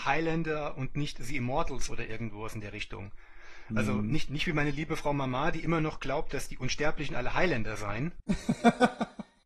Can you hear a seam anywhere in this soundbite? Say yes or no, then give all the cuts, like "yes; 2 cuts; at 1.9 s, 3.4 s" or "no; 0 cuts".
no; 0 cuts